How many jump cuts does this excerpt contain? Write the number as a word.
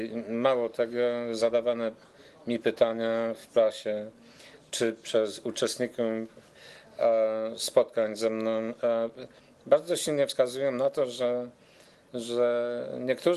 zero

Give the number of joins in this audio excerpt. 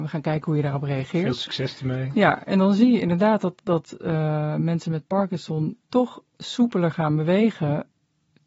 one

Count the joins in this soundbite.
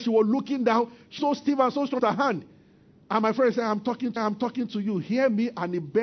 three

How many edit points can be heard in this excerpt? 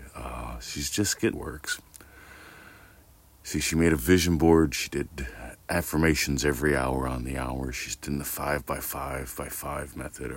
two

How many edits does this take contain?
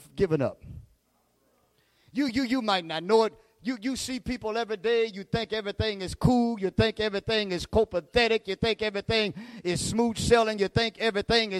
zero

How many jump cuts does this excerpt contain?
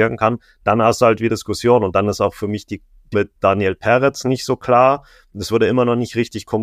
two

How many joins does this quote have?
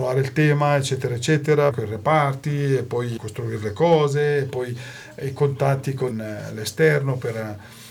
three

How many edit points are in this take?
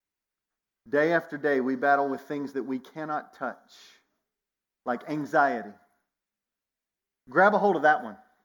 zero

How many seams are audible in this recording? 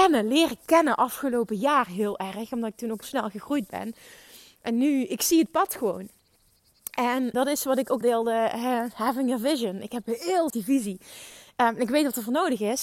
four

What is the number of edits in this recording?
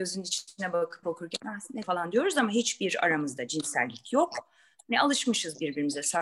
two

